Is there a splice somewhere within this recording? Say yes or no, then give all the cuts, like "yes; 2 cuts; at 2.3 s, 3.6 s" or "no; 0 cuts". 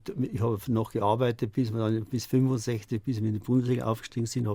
no; 0 cuts